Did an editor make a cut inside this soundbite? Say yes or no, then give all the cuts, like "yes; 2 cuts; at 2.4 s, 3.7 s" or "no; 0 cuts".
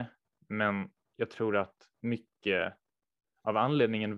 yes; 2 cuts; at 1.0 s, 1.9 s